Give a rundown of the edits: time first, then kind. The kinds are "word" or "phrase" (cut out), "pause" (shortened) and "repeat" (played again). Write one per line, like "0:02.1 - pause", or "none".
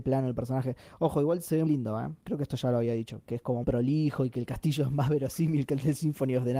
0:01.7 - word
0:02.2 - pause
0:03.2 - word
0:03.6 - word